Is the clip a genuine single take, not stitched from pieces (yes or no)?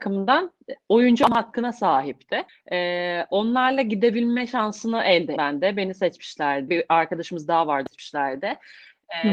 no